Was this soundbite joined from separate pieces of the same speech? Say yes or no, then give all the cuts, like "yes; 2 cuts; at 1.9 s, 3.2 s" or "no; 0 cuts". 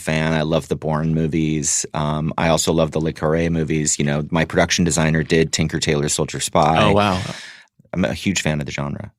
no; 0 cuts